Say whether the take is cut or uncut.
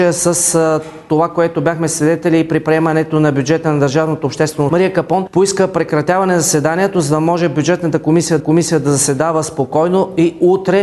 cut